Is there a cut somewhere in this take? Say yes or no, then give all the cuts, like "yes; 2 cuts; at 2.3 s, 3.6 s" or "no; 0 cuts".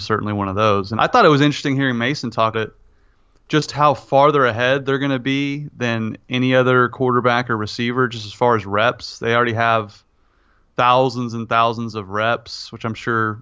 yes; 2 cuts; at 0.9 s, 2.5 s